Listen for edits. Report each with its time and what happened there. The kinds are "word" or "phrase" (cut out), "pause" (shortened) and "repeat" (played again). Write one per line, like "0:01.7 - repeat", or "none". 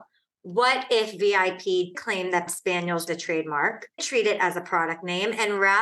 0:01.9 - word
0:02.5 - word
0:03.1 - word
0:04.0 - word